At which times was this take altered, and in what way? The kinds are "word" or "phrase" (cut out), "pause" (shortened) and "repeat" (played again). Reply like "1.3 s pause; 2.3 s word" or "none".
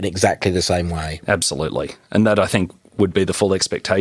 none